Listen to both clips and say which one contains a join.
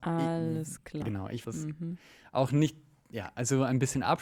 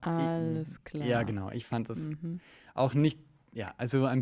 first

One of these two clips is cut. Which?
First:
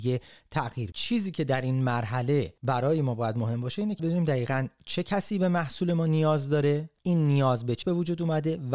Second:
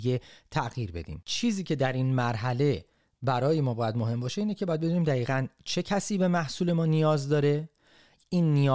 first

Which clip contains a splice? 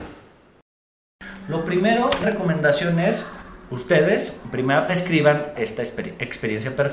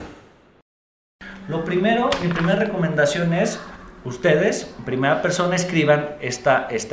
first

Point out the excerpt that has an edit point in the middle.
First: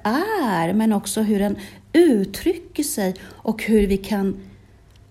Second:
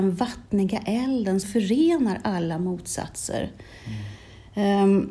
second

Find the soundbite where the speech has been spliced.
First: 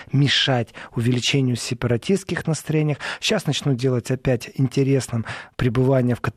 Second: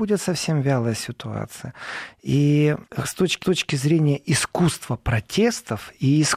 second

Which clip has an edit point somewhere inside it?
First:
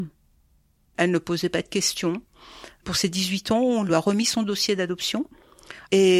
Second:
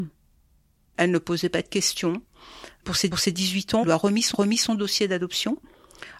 second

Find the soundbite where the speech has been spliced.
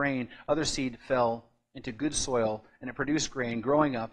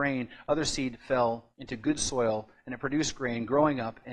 second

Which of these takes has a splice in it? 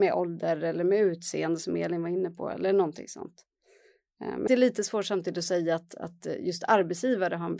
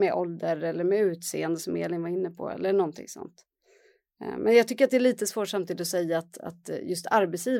first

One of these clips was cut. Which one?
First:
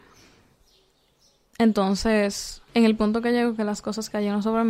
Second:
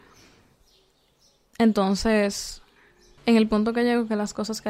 first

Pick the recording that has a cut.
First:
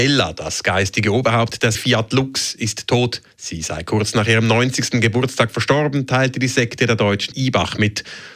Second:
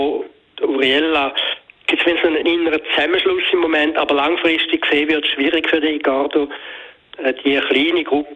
first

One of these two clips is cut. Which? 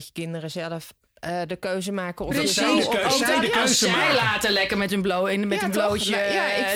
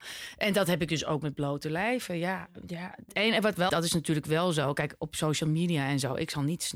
second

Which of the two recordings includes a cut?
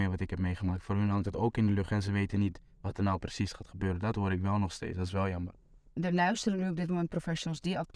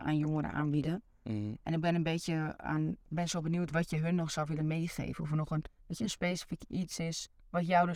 second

